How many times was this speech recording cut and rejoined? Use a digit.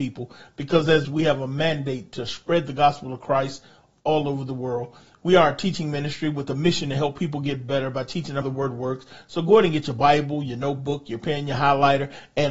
2